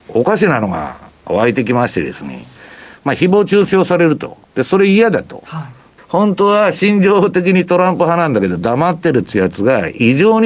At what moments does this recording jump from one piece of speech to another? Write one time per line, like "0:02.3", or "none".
0:04.4
0:06.0